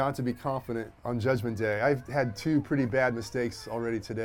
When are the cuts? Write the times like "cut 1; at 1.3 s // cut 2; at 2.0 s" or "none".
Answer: cut 1; at 1.0 s